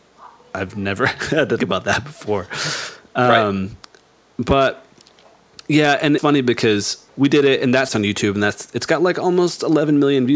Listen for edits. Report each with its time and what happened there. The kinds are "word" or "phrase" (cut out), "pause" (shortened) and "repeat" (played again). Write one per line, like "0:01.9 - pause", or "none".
0:01.6 - word
0:06.2 - word
0:07.1 - word
0:07.9 - phrase